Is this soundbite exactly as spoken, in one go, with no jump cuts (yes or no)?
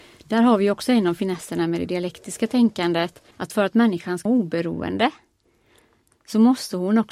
no